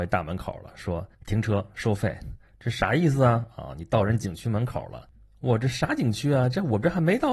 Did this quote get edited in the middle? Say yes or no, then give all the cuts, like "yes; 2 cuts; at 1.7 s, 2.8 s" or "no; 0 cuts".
yes; 1 cut; at 1.1 s